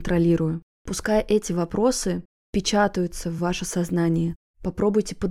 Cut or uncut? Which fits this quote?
uncut